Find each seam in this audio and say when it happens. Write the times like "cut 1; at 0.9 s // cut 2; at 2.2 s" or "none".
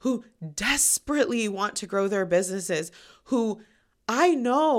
none